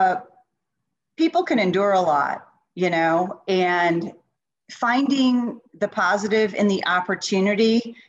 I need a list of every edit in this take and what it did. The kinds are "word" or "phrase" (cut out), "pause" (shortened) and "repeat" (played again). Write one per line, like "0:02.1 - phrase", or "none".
none